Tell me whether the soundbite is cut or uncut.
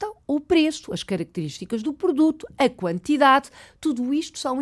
uncut